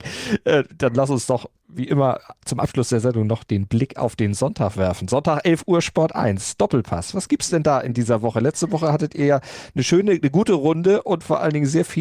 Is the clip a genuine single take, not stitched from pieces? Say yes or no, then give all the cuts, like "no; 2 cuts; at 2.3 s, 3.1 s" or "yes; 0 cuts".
yes; 0 cuts